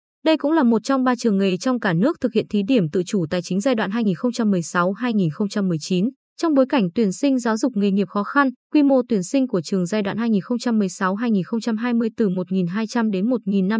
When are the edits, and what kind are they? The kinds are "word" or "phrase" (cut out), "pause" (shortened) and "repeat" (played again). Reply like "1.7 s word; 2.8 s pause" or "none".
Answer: 6.2 s pause; 8.6 s pause